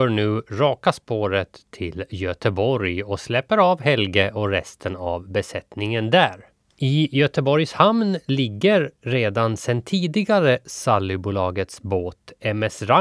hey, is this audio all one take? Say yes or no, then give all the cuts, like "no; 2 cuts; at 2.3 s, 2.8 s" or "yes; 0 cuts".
yes; 0 cuts